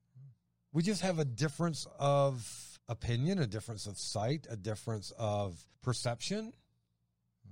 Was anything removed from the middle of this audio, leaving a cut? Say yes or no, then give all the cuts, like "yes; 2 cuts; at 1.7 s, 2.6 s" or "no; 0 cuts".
yes; 2 cuts; at 2.8 s, 5.7 s